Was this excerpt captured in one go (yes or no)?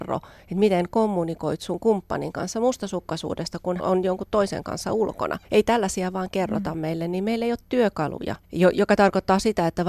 no